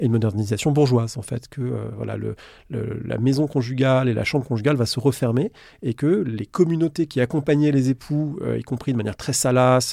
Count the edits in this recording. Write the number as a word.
zero